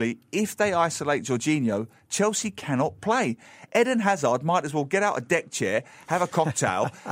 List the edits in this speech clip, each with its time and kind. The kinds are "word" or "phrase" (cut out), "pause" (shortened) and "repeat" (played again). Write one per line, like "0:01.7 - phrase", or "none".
none